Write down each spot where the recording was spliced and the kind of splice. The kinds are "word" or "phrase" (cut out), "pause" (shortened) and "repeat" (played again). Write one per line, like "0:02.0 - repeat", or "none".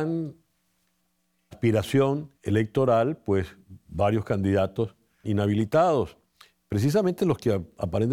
0:01.5 - phrase
0:02.3 - pause
0:05.2 - phrase